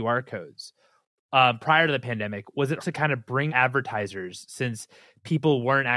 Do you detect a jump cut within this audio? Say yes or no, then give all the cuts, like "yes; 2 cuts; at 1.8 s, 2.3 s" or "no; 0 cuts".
yes; 2 cuts; at 2.8 s, 3.5 s